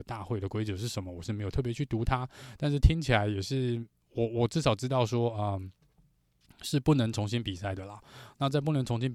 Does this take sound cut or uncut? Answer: uncut